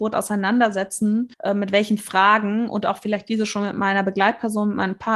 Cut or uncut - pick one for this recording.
cut